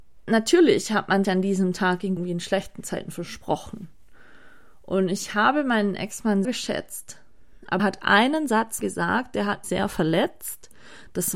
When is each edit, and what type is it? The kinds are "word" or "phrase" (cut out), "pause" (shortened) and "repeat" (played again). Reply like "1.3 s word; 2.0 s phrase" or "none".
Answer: 1.2 s word; 2.2 s word; 6.4 s word; 7.8 s word; 8.8 s word; 9.6 s word